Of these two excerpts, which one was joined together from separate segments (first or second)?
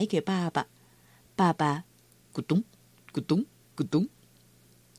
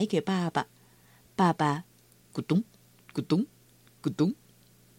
first